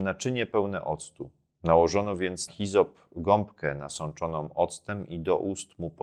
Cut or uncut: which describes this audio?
cut